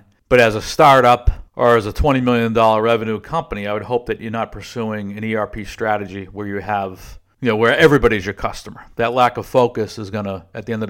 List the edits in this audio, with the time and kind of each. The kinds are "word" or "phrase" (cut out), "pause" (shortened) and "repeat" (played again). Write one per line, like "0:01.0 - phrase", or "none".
0:01.5 - pause